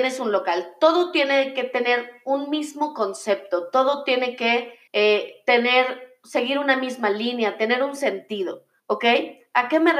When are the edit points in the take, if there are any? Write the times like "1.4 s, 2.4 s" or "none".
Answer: 4.9 s, 8.8 s